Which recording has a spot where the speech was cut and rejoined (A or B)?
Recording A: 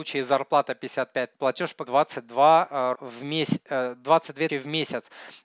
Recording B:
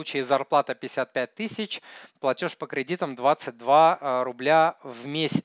A